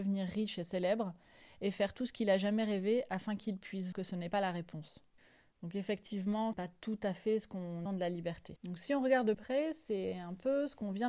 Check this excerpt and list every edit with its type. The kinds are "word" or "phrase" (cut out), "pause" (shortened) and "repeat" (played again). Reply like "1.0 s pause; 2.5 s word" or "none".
3.9 s word; 6.5 s word; 7.9 s word; 9.3 s word